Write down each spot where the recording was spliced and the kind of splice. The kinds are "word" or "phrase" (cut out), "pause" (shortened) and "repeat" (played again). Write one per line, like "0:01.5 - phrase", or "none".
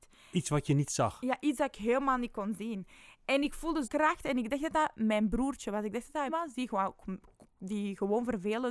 0:03.8 - word
0:06.3 - word
0:07.5 - pause